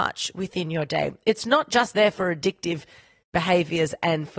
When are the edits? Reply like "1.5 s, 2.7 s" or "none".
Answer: none